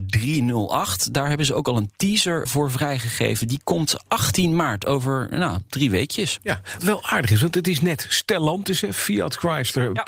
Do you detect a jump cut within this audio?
yes; 2 cuts; at 2.4 s, 6.8 s

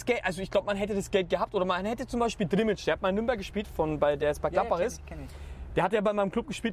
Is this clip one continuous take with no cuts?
yes; 0 cuts

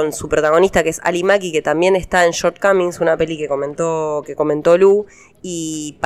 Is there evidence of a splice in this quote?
no; 0 cuts

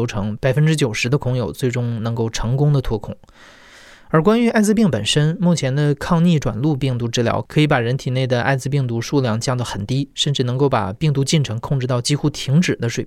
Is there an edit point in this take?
no; 0 cuts

